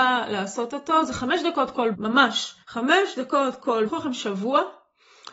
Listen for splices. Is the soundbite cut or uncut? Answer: cut